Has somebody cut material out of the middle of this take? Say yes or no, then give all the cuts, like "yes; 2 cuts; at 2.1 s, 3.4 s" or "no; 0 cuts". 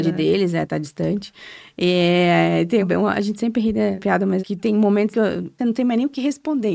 yes; 5 cuts; at 2.8 s, 4.0 s, 4.4 s, 5.1 s, 5.6 s